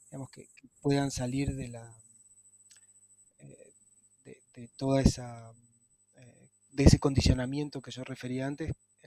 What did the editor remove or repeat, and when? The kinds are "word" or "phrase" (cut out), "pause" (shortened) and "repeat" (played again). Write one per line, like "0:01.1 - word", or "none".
none